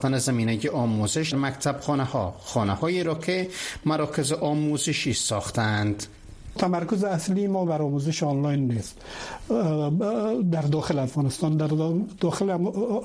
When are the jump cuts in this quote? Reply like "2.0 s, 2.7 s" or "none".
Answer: 1.3 s